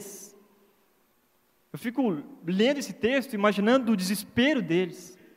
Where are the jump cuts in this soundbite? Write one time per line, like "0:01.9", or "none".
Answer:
none